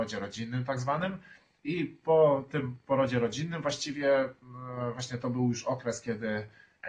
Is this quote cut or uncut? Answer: uncut